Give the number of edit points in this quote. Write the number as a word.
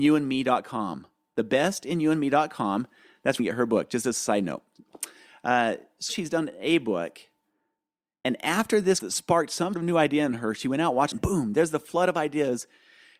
five